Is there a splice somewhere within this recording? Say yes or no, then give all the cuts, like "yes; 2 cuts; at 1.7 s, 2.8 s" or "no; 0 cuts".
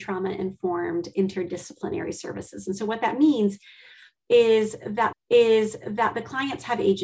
yes; 1 cut; at 5.1 s